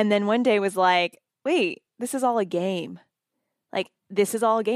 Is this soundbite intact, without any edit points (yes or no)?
yes